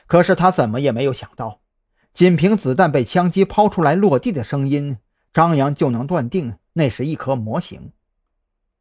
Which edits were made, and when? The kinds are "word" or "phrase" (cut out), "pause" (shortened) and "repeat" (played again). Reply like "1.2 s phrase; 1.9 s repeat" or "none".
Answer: none